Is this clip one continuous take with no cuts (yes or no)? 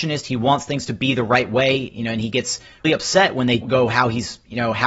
no